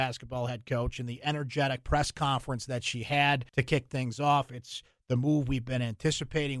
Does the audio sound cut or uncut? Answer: cut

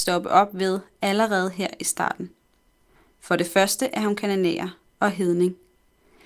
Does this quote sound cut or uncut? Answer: uncut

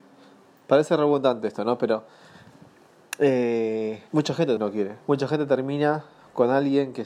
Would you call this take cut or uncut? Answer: cut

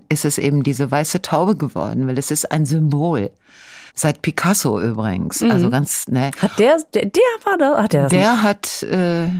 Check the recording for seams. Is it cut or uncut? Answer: cut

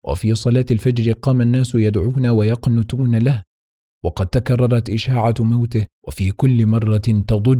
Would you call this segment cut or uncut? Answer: cut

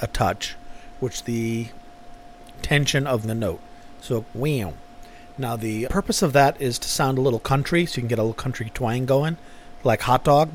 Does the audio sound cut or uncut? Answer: cut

